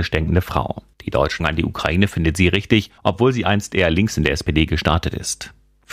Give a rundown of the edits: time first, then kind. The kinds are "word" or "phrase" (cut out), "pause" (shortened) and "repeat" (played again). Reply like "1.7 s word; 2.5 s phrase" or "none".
0.9 s pause; 1.4 s word; 3.0 s pause